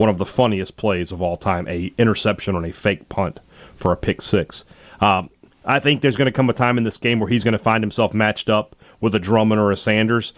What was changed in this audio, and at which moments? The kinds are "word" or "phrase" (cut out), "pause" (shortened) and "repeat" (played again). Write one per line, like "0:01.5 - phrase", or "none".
none